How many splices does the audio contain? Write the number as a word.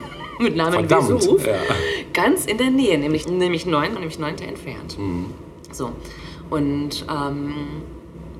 three